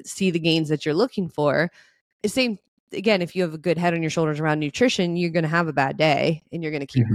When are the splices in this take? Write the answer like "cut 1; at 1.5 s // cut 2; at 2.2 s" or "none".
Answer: none